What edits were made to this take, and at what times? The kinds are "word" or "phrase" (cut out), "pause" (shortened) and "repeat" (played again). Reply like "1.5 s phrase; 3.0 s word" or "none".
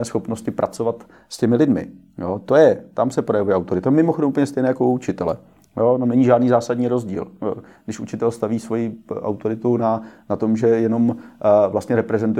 none